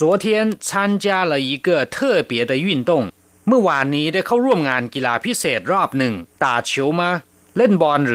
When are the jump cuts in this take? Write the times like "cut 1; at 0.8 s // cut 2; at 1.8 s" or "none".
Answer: cut 1; at 6.3 s